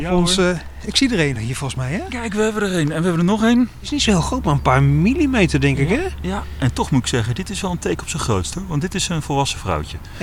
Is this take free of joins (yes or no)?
yes